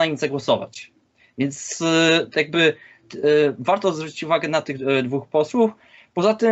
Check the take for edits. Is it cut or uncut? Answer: uncut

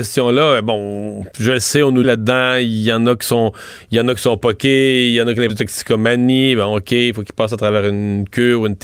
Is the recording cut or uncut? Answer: cut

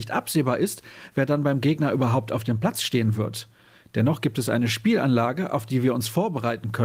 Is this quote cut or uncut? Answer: uncut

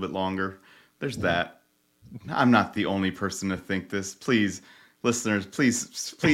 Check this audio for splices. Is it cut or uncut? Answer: uncut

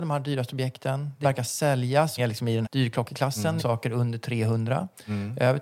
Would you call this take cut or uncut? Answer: cut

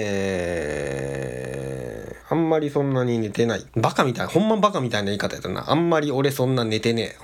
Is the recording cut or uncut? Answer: cut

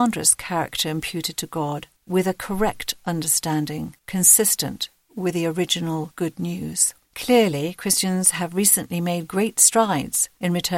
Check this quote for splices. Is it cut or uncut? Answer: cut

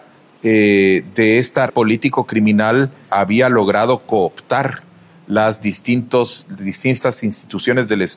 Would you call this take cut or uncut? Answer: cut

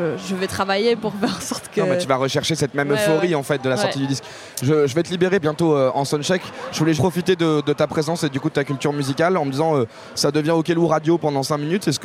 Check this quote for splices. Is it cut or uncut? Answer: cut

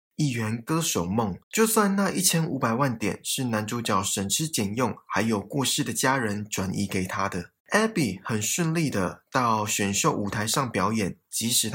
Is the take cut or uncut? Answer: cut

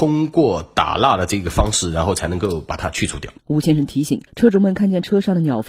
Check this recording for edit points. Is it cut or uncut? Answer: cut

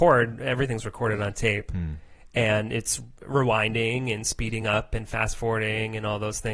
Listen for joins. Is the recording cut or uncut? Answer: uncut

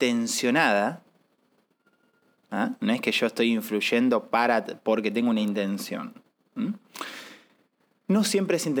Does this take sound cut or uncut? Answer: uncut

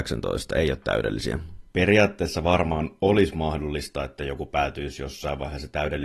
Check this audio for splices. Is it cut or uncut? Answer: uncut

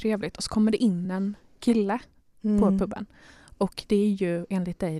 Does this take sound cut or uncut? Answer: uncut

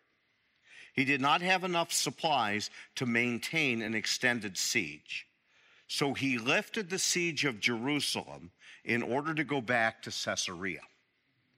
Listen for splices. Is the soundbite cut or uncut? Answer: uncut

